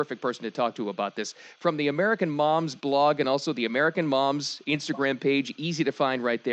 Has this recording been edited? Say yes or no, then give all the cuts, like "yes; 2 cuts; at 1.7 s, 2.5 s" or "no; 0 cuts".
no; 0 cuts